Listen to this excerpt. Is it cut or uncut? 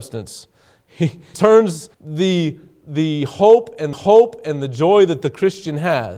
cut